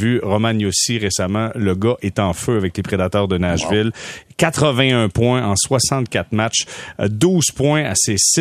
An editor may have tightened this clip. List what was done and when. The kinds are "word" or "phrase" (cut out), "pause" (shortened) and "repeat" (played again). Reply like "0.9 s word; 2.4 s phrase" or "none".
none